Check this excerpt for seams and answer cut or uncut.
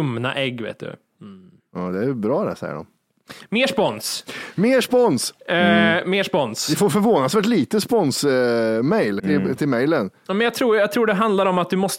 cut